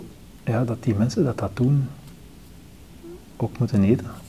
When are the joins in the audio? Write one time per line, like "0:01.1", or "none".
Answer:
none